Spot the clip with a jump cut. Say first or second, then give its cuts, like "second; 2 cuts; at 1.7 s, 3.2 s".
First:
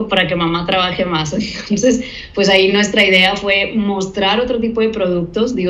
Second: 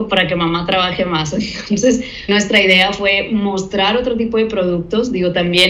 second; 1 cut; at 2.3 s